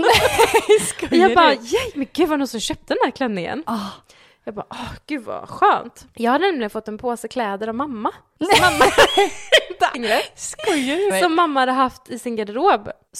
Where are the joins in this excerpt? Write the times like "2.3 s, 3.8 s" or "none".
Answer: 9.9 s, 11.1 s